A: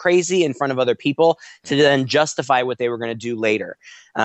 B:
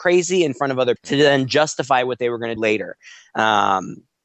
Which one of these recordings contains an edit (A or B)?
B